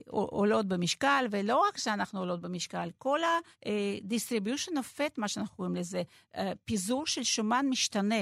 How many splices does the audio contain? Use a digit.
1